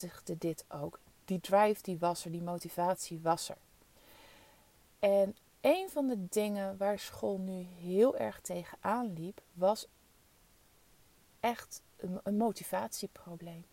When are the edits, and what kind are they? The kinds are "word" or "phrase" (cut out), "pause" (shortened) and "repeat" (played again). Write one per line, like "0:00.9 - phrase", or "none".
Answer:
none